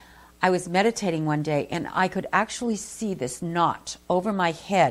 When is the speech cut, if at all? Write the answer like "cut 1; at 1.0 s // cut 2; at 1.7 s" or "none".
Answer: none